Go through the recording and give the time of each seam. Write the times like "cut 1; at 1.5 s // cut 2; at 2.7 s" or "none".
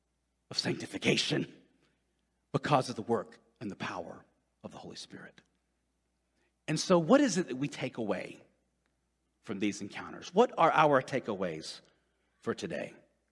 none

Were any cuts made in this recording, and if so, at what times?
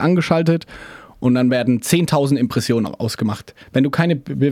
none

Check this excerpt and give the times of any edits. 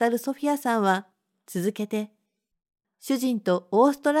none

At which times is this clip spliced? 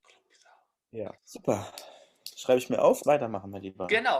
cut 1; at 1.2 s // cut 2; at 3.0 s

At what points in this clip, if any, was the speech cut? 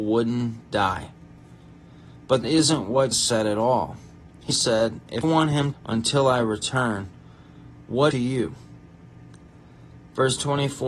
cut 1; at 2.4 s // cut 2; at 3.1 s // cut 3; at 4.5 s // cut 4; at 5.2 s // cut 5; at 5.7 s // cut 6; at 8.1 s

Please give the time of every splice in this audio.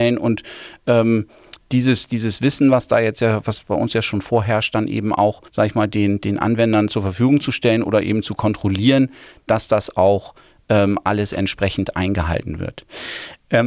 cut 1; at 5.5 s

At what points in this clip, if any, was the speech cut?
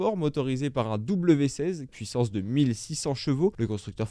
cut 1; at 1.9 s

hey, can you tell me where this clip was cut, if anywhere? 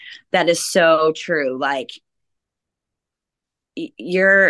none

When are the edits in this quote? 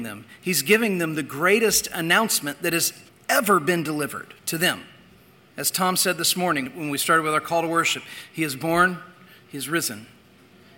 cut 1; at 3.1 s // cut 2; at 4.4 s // cut 3; at 6.7 s

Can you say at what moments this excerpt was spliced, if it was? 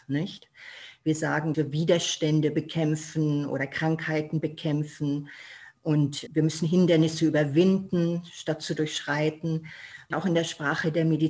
cut 1; at 1.5 s // cut 2; at 6.3 s // cut 3; at 10.1 s

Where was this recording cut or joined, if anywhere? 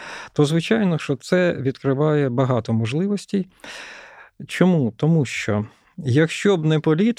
none

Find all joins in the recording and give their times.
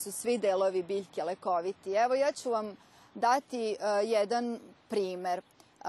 none

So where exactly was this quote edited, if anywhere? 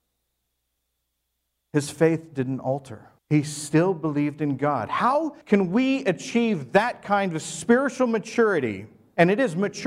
cut 1; at 3.2 s // cut 2; at 5.4 s

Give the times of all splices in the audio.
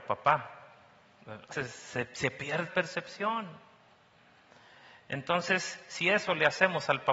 cut 1; at 1.5 s // cut 2; at 2.7 s

